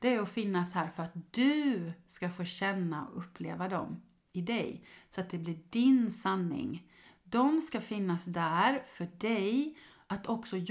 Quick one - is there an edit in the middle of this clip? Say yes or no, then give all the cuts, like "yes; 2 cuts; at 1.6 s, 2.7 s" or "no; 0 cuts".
no; 0 cuts